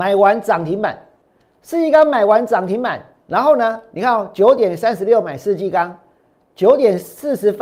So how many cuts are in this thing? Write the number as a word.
zero